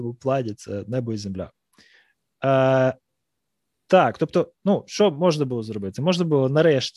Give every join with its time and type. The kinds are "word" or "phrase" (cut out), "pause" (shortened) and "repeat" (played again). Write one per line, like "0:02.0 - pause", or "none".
none